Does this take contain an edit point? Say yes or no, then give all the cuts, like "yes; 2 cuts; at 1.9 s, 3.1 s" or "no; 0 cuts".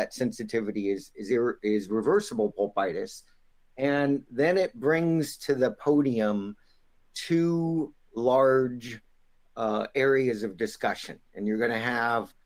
no; 0 cuts